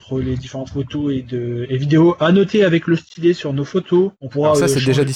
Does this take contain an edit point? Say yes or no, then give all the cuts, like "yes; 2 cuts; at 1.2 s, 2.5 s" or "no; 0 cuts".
yes; 1 cut; at 4.2 s